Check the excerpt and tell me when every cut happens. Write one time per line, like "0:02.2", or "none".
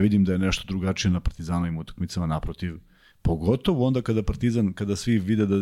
none